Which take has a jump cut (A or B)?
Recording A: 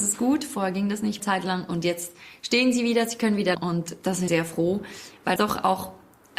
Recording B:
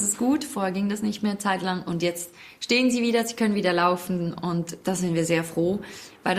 A